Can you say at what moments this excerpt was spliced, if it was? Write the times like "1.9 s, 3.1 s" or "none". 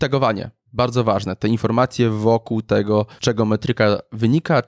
3.2 s

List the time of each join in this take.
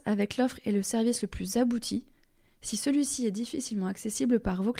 none

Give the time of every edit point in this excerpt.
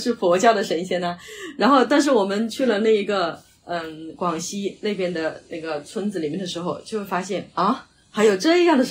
none

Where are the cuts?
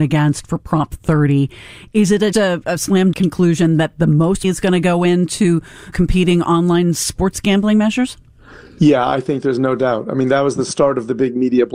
2.3 s, 3.1 s, 4.4 s, 5.9 s

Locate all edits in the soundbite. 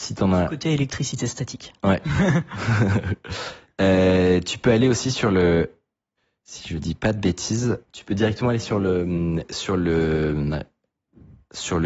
6.2 s, 7.9 s

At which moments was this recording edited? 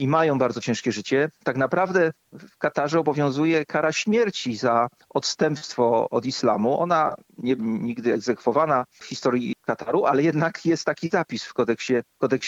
7.6 s

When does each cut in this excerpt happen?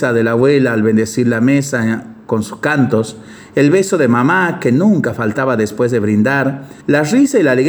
6.8 s

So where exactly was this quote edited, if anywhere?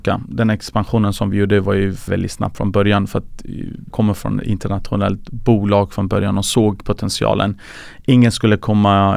2.1 s, 3.9 s

